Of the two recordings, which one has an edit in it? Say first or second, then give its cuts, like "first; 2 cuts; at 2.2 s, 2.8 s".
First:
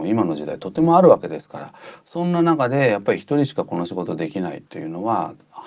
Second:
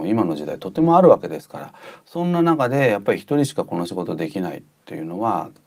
first; 1 cut; at 4.7 s